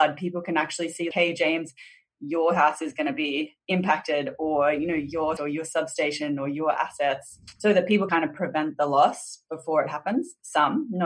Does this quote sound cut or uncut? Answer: cut